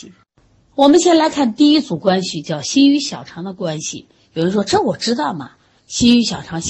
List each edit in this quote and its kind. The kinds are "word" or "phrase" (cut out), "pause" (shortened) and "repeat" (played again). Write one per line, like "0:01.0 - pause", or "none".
none